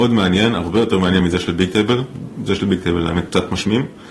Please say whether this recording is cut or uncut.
uncut